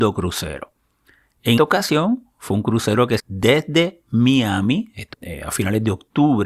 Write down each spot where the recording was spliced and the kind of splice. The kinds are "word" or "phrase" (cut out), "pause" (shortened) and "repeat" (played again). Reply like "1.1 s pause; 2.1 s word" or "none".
1.6 s word; 3.2 s word; 5.1 s word